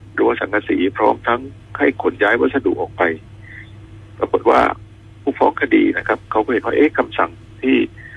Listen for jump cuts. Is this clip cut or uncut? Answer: cut